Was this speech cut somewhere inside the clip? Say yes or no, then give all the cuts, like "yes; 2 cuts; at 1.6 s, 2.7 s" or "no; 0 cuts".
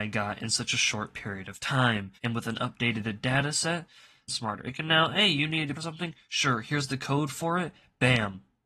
yes; 3 cuts; at 2.2 s, 4.3 s, 5.7 s